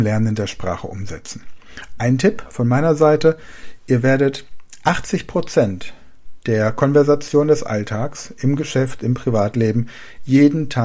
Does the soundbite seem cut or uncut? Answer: uncut